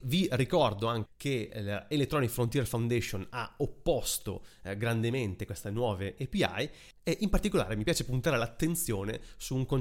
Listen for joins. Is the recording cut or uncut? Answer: cut